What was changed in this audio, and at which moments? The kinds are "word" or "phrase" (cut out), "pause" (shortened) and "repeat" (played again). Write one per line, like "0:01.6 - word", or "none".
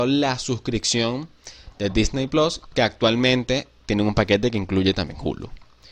none